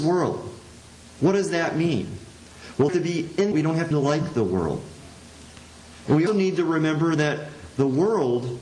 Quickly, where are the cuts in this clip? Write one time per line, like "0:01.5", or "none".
0:02.9
0:03.5
0:03.9
0:06.3